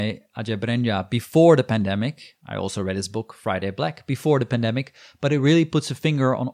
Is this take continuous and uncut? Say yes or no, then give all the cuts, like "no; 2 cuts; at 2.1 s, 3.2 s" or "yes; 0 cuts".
yes; 0 cuts